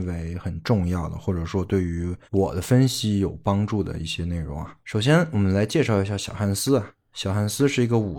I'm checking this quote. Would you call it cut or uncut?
cut